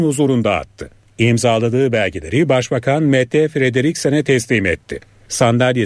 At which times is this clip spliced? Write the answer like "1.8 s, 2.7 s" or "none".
none

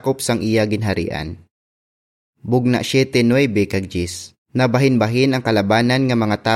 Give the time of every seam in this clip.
4.4 s

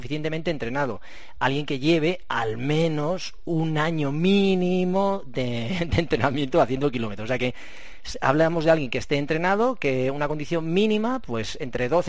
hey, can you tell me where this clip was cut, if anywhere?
none

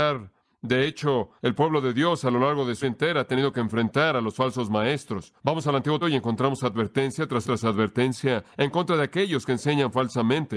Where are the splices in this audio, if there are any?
1.4 s, 2.8 s, 5.4 s, 6.0 s, 7.4 s, 8.5 s

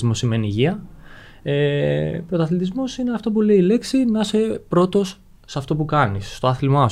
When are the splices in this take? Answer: none

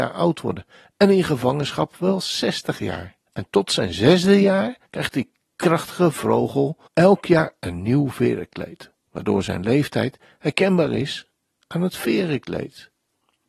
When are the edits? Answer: 3.3 s, 4.8 s, 6.9 s, 9.0 s

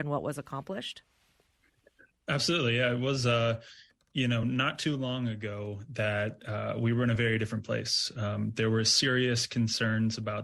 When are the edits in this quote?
none

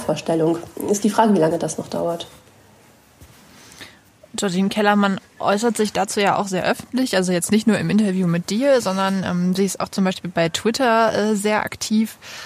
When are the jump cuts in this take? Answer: none

